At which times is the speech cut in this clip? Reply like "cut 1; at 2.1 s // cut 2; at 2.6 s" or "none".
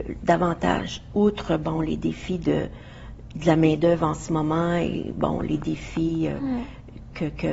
none